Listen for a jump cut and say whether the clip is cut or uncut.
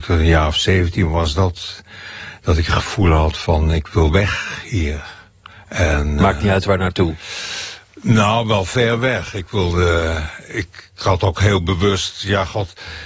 uncut